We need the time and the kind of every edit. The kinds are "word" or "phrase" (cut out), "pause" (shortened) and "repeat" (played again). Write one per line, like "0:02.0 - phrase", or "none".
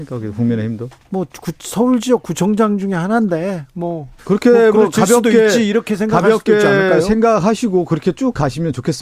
0:01.0 - pause
0:04.2 - pause